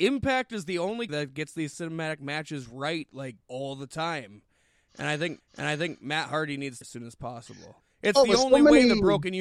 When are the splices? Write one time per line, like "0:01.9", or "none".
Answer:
0:01.1
0:03.4
0:05.4
0:06.8
0:07.8